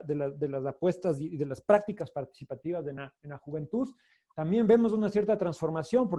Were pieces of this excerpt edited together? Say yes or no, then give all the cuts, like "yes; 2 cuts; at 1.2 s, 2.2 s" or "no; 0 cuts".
no; 0 cuts